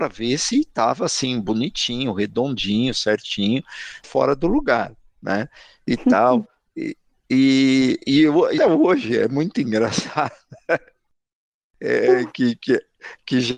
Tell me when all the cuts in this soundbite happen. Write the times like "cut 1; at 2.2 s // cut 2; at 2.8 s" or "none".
cut 1; at 4.0 s // cut 2; at 8.6 s